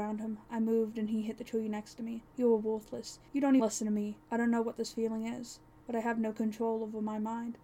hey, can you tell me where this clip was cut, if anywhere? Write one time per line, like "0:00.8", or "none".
0:02.3
0:03.3
0:03.6
0:04.2